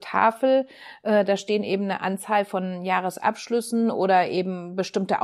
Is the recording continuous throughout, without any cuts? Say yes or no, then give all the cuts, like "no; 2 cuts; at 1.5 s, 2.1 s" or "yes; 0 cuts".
yes; 0 cuts